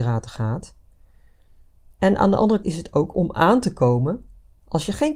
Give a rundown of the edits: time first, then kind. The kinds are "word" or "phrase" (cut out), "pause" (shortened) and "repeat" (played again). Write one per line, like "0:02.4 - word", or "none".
0:02.6 - word
0:03.1 - word